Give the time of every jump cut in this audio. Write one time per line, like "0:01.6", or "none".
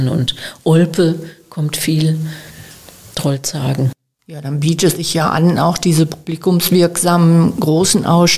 0:05.0